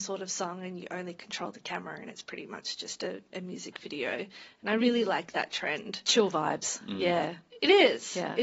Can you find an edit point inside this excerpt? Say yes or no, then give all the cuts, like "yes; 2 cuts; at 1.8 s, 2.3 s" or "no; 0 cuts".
no; 0 cuts